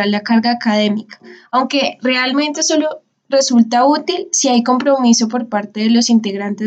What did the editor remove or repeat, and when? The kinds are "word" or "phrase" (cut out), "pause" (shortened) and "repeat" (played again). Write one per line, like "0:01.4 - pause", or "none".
none